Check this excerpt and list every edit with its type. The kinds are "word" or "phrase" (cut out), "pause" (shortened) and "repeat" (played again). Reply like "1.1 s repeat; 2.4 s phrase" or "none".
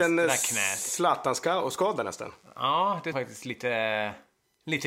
3.1 s word